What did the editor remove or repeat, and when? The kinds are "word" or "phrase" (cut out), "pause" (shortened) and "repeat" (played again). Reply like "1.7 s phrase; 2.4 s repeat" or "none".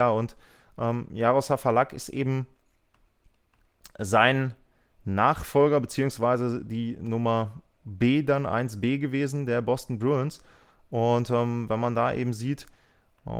none